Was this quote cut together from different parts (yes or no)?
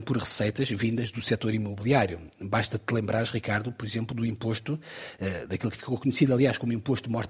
no